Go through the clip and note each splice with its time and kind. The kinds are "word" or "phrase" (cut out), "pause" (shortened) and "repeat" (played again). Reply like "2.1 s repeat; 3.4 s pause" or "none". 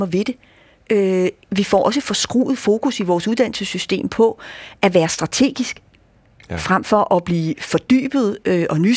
none